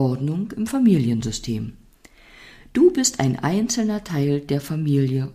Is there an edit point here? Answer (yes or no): no